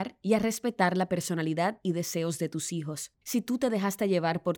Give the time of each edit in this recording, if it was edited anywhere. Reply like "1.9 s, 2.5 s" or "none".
3.2 s